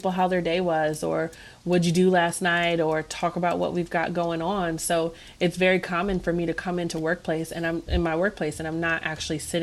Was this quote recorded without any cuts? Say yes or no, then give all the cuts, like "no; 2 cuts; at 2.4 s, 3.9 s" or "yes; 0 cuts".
yes; 0 cuts